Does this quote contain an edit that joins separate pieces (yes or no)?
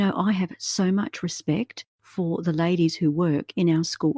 no